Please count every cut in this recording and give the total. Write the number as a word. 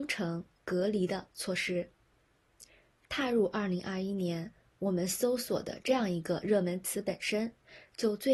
zero